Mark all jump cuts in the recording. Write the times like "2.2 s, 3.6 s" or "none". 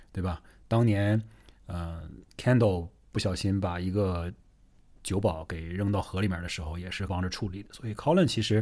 2.2 s, 7.1 s